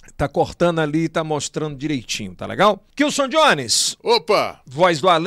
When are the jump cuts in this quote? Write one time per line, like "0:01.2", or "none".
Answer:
0:02.9